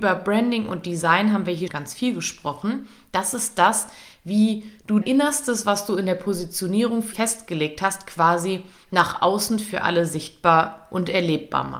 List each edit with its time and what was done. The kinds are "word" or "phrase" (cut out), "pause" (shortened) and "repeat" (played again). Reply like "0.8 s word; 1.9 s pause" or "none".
1.7 s word; 5.0 s word; 7.1 s word